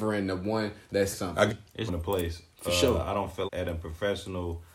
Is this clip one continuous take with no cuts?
no; 4 cuts; at 1.1 s, 1.5 s, 1.9 s, 3.5 s

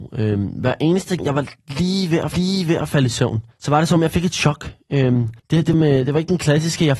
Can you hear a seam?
yes; 5 cuts; at 1.2 s, 2.3 s, 3.5 s, 5.4 s, 5.7 s

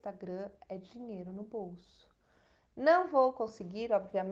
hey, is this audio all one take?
yes; 0 cuts

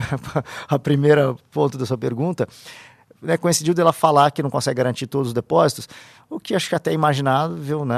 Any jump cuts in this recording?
no; 0 cuts

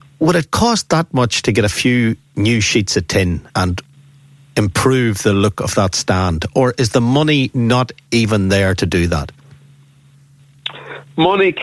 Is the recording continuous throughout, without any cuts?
no; 2 cuts; at 2.2 s, 3.5 s

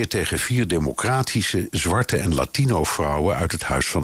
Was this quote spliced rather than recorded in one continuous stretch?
no; 0 cuts

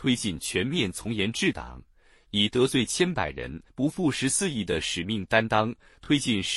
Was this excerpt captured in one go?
no; 1 cut; at 3.7 s

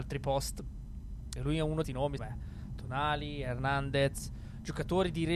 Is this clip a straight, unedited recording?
no; 3 cuts; at 1.4 s, 1.8 s, 2.2 s

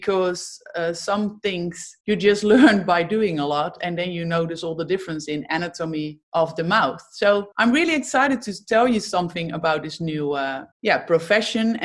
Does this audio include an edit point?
yes; 4 cuts; at 2.0 s, 6.2 s, 7.5 s, 10.7 s

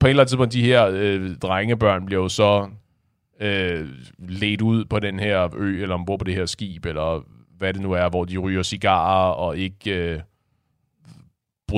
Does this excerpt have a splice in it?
no; 0 cuts

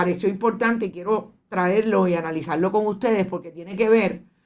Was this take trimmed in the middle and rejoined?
no; 0 cuts

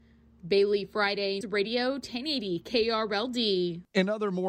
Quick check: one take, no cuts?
no; 1 cut; at 1.4 s

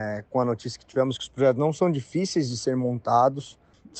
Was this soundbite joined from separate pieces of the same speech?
no; 0 cuts

